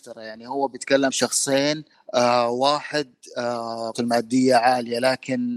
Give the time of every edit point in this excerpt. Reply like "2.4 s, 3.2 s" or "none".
1.1 s, 3.9 s